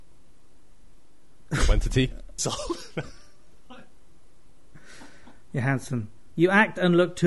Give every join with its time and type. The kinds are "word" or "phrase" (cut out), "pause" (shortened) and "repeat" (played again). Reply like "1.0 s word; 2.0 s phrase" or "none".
2.4 s word